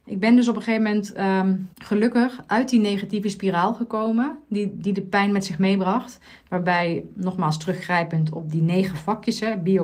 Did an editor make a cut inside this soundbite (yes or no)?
yes